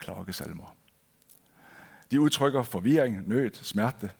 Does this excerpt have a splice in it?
no; 0 cuts

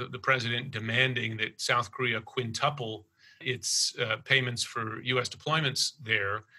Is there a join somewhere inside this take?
no; 0 cuts

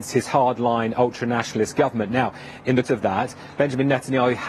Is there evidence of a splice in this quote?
yes; 1 cut; at 2.8 s

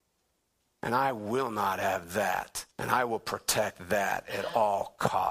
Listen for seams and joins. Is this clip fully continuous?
no; 1 cut; at 2.7 s

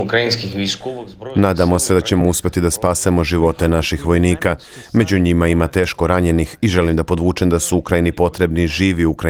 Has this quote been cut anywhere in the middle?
no; 0 cuts

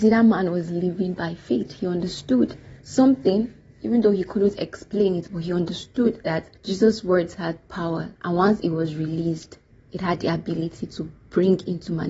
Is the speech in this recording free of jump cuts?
no; 4 cuts; at 2.8 s, 6.6 s, 8.2 s, 9.7 s

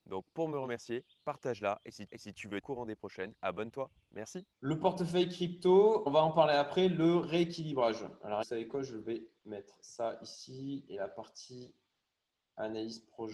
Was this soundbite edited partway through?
yes; 6 cuts; at 2.1 s, 2.6 s, 3.3 s, 4.5 s, 6.1 s, 8.4 s

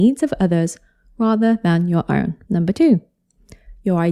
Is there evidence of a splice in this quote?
yes; 1 cut; at 2.4 s

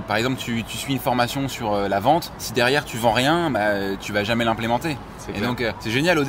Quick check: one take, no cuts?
yes; 0 cuts

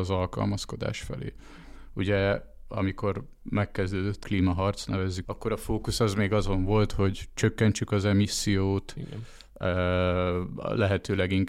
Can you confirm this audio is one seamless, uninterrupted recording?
no; 2 cuts; at 4.2 s, 5.3 s

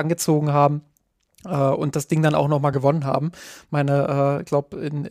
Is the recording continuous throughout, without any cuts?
yes; 0 cuts

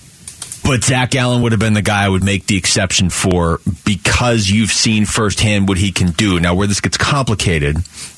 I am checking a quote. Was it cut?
no; 0 cuts

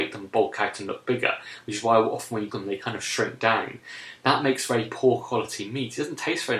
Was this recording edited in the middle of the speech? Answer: yes; 1 cut; at 2.5 s

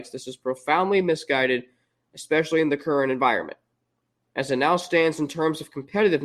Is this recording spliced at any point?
no; 0 cuts

